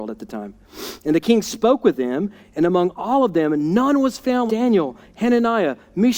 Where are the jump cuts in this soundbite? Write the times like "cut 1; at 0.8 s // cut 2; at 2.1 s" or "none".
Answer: cut 1; at 4.5 s